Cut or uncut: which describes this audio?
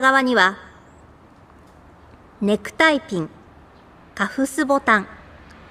uncut